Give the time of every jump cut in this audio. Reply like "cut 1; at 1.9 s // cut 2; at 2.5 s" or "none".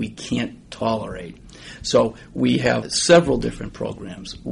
cut 1; at 2.8 s